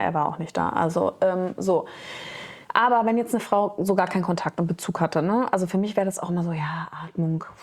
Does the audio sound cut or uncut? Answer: cut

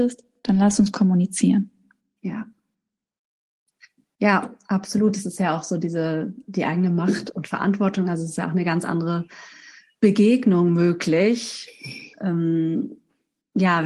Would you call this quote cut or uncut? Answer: uncut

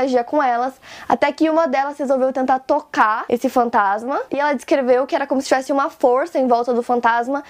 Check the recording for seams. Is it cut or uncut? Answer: cut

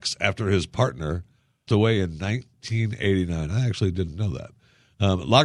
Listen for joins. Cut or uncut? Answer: cut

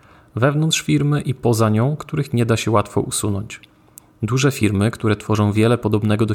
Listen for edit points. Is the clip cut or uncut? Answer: uncut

